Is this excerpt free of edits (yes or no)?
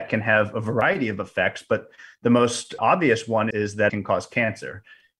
no